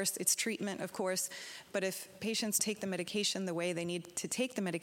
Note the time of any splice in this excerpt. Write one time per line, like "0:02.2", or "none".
0:02.6